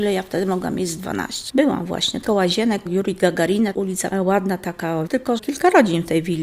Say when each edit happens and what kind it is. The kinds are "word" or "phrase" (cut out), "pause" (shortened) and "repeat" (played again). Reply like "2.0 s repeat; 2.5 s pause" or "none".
1.5 s word; 2.3 s word; 2.9 s word; 4.1 s word; 5.1 s word; 5.4 s word